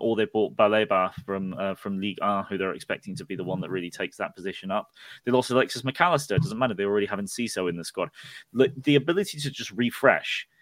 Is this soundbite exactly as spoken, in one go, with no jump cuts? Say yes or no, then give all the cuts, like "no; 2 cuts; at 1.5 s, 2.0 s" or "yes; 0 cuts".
yes; 0 cuts